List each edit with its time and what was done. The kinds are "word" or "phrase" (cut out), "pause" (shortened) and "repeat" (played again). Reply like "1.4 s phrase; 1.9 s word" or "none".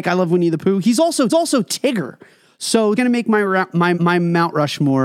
1.3 s repeat; 3.0 s word; 3.9 s repeat